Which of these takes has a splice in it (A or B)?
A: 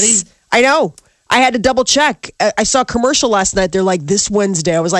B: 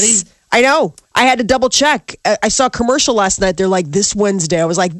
B